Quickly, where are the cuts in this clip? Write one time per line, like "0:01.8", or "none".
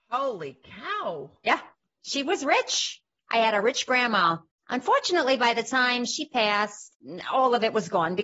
none